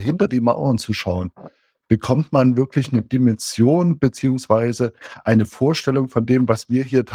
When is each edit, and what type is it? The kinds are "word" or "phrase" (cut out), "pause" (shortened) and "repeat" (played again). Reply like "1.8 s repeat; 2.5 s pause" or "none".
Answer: none